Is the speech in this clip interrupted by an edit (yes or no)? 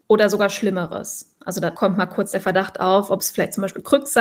no